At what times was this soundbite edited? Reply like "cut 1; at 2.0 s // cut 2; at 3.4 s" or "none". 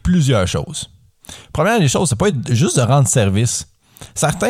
none